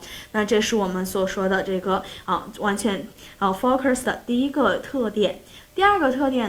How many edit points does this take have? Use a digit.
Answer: 1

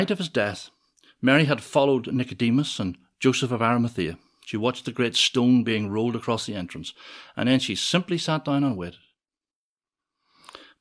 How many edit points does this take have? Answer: 0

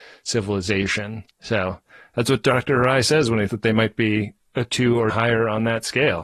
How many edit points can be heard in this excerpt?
3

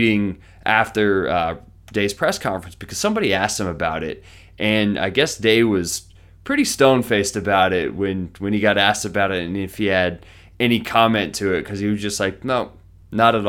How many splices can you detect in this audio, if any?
0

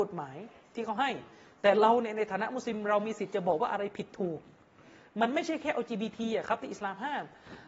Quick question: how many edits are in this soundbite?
0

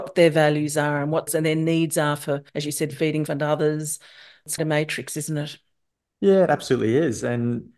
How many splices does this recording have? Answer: 4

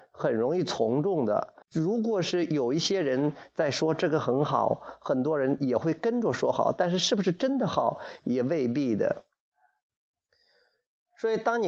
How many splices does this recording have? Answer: 1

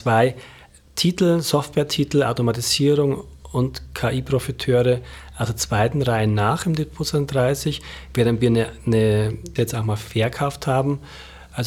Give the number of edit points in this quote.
1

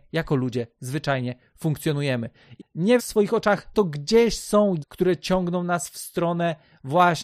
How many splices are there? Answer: 4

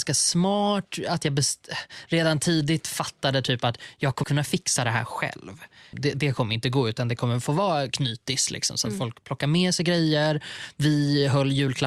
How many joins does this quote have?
2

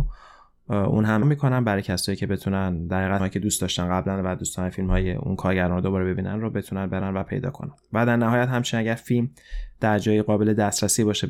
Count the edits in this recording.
2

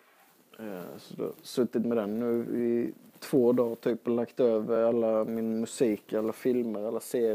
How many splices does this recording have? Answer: 0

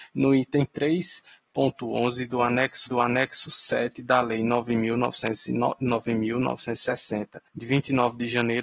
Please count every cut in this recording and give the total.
2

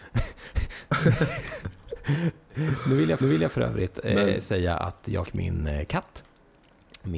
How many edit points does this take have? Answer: 2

